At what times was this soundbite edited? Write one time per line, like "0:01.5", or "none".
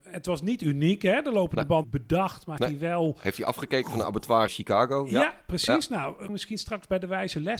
0:01.8
0:02.6
0:04.5
0:06.3

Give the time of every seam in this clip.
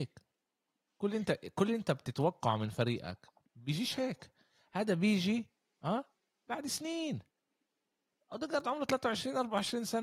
none

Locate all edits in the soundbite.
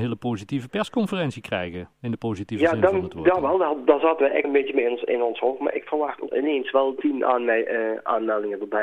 0:04.4
0:06.3

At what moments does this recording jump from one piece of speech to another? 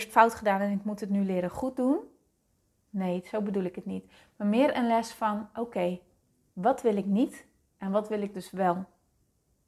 none

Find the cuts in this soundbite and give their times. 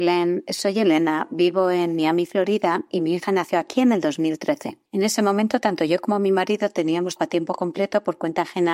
0:04.9
0:07.2

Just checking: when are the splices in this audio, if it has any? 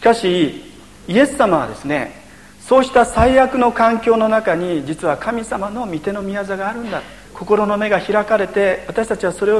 0:07.2

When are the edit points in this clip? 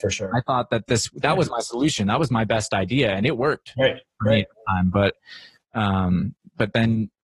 none

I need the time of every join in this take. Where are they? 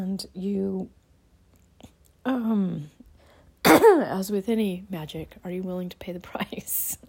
none

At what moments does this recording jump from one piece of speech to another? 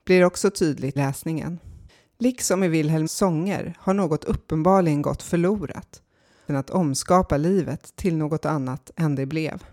0:01.0
0:01.9
0:03.1
0:06.5

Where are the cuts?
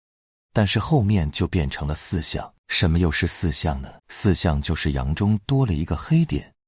0:02.6
0:04.0

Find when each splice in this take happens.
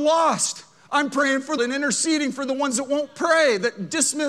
0:01.6

